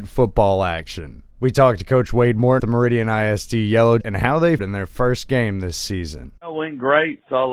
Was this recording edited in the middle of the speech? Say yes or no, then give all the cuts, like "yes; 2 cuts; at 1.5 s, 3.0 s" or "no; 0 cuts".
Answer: yes; 5 cuts; at 1.3 s, 2.6 s, 4.0 s, 4.6 s, 6.4 s